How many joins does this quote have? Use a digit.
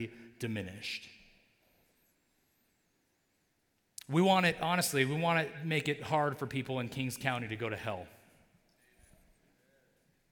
0